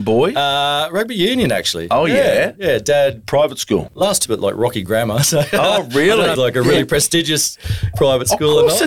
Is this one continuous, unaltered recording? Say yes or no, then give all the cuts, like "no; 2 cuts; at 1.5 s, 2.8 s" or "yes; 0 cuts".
no; 2 cuts; at 4.3 s, 6.4 s